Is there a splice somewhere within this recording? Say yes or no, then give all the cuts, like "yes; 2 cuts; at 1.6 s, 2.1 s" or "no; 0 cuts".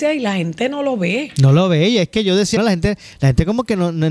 yes; 1 cut; at 2.6 s